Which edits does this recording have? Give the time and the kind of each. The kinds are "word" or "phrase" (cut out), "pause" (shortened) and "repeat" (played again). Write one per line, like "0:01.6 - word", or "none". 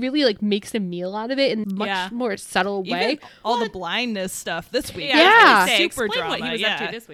0:01.6 - word